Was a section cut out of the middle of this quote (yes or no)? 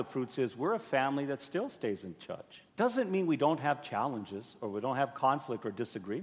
yes